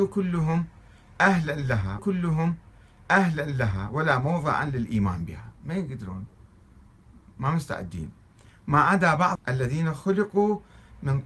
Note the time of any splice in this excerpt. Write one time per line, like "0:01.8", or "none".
0:02.0
0:05.6
0:09.4